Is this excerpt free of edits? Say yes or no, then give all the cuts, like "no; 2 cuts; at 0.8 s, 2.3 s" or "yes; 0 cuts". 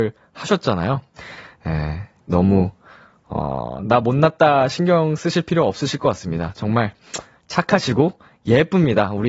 yes; 0 cuts